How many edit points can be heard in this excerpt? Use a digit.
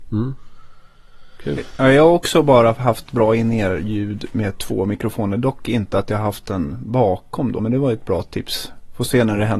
1